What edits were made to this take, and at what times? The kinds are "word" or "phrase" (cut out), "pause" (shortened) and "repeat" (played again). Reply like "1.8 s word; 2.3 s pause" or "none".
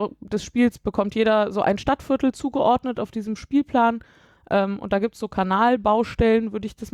none